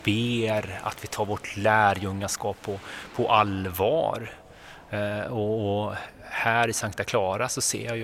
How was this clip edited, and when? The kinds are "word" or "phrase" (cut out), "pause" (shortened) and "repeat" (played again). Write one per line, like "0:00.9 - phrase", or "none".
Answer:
none